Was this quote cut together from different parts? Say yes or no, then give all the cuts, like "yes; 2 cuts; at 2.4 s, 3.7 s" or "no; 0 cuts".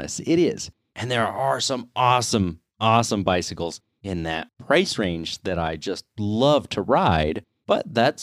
no; 0 cuts